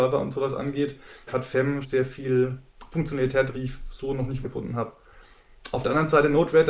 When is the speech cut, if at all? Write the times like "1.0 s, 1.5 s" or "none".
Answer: 1.3 s, 1.8 s, 3.5 s, 4.4 s